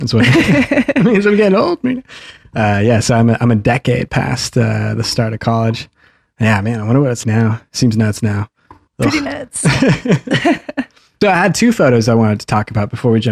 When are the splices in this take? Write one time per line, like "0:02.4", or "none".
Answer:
0:07.2
0:08.9
0:11.2